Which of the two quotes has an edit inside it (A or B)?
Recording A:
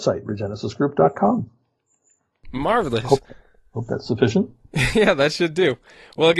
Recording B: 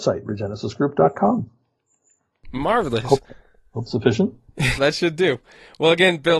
B